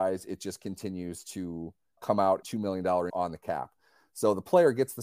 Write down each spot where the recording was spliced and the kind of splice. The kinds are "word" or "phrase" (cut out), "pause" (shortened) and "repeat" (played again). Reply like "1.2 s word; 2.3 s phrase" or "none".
2.0 s word; 2.4 s word; 3.1 s word